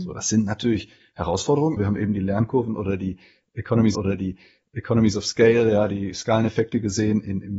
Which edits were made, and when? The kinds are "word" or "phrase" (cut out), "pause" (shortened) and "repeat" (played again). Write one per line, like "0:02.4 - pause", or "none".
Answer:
0:01.8 - word
0:03.9 - repeat